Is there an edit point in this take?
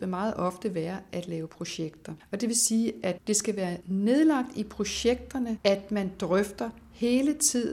no; 0 cuts

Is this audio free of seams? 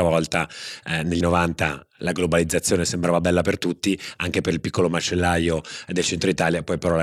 no; 1 cut; at 1.2 s

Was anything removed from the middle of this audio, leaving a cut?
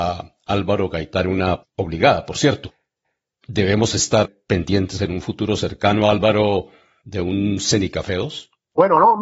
yes; 2 cuts; at 1.6 s, 4.2 s

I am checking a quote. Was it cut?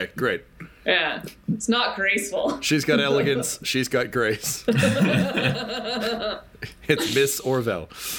no; 0 cuts

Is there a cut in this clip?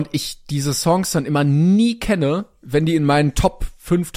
no; 0 cuts

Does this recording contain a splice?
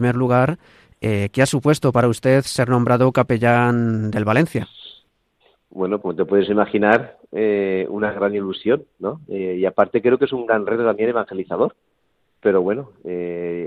yes; 1 cut; at 6.0 s

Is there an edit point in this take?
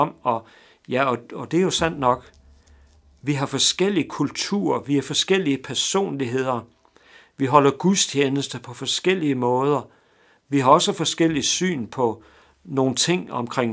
no; 0 cuts

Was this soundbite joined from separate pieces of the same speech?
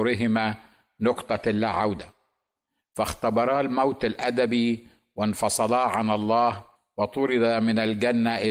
no; 0 cuts

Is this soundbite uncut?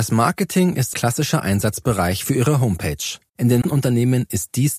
no; 3 cuts; at 0.9 s, 3.3 s, 3.6 s

